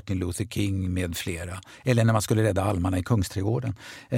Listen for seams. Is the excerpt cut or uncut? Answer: uncut